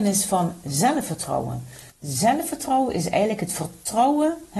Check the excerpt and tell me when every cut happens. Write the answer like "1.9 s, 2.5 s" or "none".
1.9 s